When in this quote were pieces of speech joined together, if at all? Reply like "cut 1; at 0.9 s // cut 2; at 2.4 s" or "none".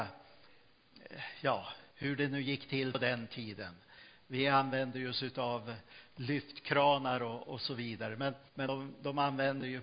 cut 1; at 1.9 s // cut 2; at 8.5 s